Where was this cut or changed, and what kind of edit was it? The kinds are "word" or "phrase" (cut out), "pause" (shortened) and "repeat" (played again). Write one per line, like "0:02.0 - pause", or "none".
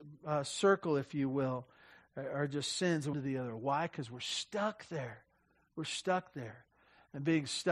0:03.1 - phrase

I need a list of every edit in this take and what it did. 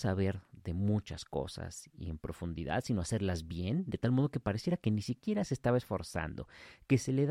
none

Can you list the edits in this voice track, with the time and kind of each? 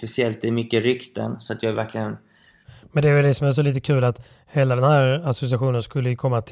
0:01.7 - phrase

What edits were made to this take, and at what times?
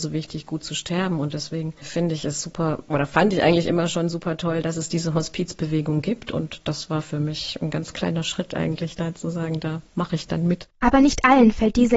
0:09.9 - pause
0:10.7 - pause

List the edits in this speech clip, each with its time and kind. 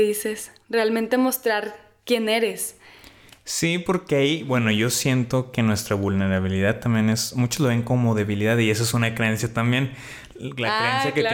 none

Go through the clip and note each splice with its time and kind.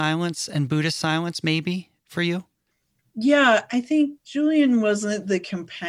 none

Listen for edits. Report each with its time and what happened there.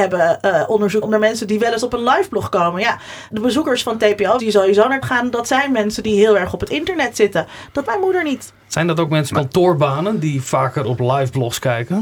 0:01.0 - word
0:03.3 - word
0:04.4 - word
0:05.0 - word
0:07.8 - word
0:09.3 - word

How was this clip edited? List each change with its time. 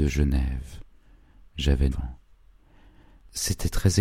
0:01.9 - word

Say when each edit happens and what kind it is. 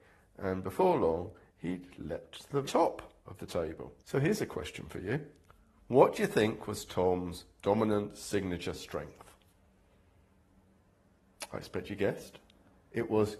0:02.6 - word
0:03.2 - pause
0:04.0 - pause
0:05.5 - pause

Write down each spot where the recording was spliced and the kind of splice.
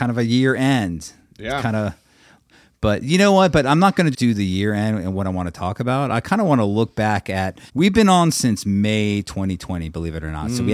0:04.1 - word
0:07.7 - pause

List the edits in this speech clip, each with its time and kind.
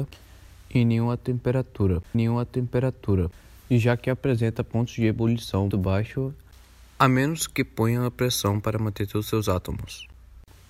0:02.1 - repeat
0:05.7 - word

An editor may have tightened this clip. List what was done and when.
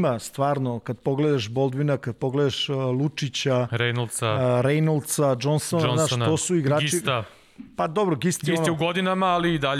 none

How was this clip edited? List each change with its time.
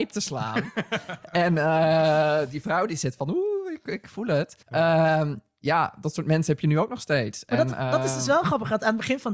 0:04.6 - pause

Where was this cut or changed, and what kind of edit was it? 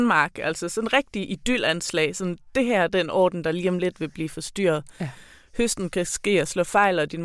none

